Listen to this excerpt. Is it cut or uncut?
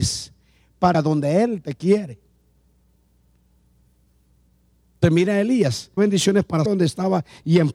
cut